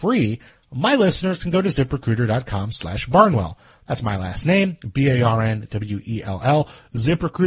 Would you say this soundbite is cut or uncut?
uncut